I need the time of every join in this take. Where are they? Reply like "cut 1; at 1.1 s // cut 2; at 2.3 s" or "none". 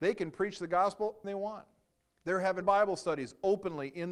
cut 1; at 1.2 s // cut 2; at 1.9 s // cut 3; at 2.6 s